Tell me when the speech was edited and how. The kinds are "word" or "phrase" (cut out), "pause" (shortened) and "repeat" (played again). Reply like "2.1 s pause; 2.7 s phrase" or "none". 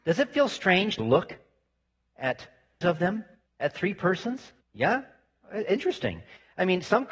1.0 s word; 2.8 s word; 3.5 s pause; 4.6 s pause